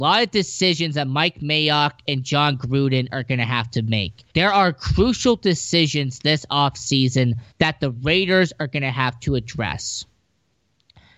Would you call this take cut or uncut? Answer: cut